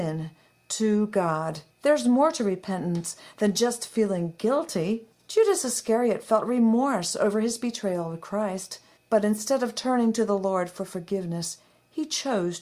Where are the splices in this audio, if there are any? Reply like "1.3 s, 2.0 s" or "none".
1.7 s, 5.1 s, 9.0 s